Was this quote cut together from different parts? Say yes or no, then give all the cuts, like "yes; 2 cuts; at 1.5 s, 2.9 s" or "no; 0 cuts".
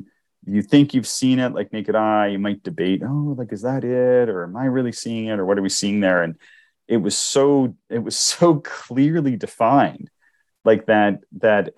no; 0 cuts